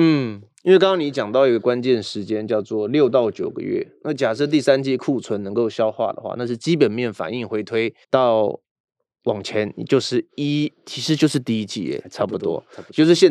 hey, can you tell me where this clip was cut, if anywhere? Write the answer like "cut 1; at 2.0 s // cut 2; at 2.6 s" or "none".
cut 1; at 8.0 s